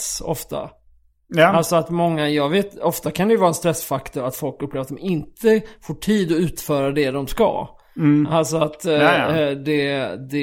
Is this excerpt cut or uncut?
uncut